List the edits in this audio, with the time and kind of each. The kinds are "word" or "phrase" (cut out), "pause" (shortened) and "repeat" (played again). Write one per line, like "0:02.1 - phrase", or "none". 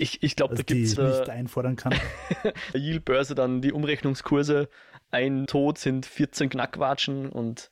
0:01.0 - word
0:02.7 - phrase
0:05.5 - word